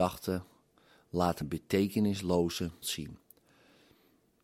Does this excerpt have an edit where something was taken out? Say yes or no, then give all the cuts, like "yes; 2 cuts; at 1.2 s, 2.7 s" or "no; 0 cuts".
yes; 2 cuts; at 1.4 s, 2.8 s